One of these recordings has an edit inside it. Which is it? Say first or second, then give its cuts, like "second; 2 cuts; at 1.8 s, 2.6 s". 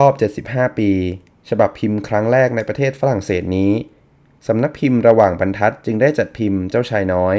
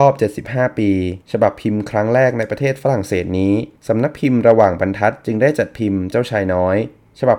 second; 2 cuts; at 1.2 s, 3.8 s